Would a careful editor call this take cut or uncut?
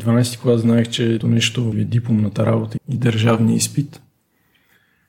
cut